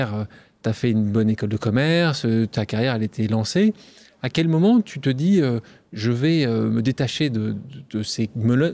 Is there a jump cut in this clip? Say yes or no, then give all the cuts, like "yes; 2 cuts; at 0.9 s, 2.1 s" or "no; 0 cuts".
no; 0 cuts